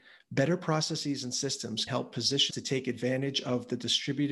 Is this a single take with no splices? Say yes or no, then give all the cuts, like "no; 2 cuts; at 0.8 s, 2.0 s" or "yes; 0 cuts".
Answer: no; 2 cuts; at 1.9 s, 2.5 s